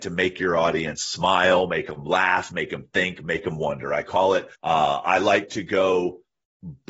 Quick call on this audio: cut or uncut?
cut